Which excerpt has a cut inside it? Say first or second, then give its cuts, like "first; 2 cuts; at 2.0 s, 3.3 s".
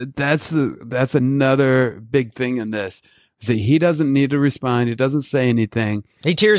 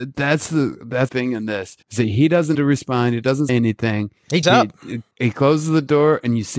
second; 6 cuts; at 1.1 s, 1.8 s, 2.5 s, 3.5 s, 4.4 s, 5.1 s